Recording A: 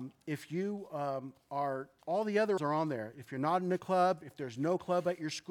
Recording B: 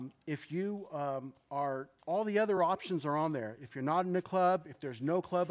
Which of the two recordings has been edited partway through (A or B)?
A